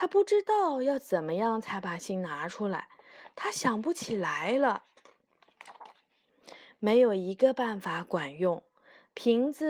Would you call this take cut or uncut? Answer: uncut